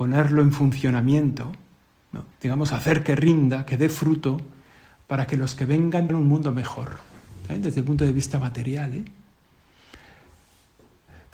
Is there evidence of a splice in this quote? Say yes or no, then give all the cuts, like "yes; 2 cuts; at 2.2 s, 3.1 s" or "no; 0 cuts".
yes; 2 cuts; at 2.3 s, 6.1 s